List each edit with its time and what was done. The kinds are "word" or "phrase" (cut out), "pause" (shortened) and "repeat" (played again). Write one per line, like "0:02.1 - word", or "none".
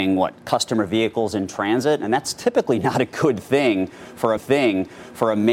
0:04.4 - repeat